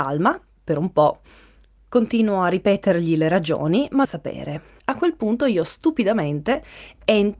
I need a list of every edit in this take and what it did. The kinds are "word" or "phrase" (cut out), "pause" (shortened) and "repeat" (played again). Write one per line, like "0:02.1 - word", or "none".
0:04.0 - phrase
0:04.8 - pause